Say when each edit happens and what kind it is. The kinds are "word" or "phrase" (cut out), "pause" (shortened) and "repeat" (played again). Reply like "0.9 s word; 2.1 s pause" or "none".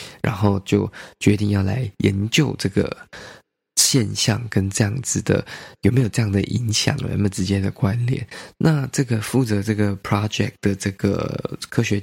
none